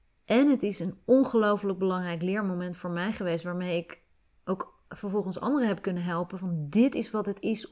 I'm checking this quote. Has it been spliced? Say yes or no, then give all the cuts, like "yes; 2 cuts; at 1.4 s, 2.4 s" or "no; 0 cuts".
yes; 1 cut; at 4.9 s